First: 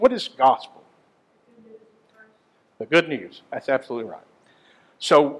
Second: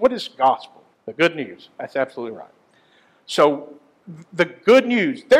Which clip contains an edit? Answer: second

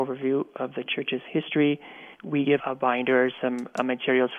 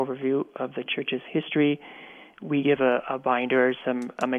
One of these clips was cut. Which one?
first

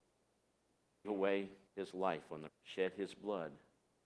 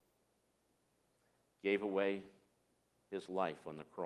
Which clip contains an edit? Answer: first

